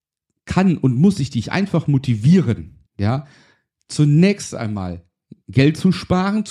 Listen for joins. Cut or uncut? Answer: cut